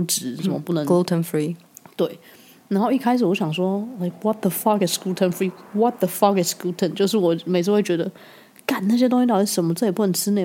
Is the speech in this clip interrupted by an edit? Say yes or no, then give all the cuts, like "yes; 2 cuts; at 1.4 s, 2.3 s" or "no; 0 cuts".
no; 0 cuts